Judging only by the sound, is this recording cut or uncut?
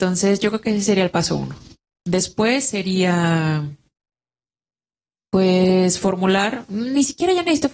uncut